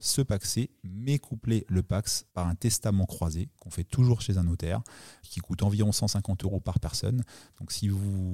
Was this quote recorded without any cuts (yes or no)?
no